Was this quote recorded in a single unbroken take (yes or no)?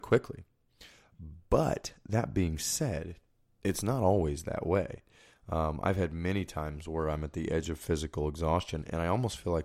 yes